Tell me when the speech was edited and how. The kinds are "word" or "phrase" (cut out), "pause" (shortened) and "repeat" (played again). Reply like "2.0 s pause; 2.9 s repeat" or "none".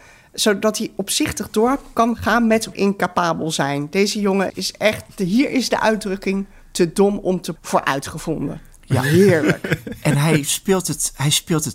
2.7 s word; 4.5 s word; 7.6 s word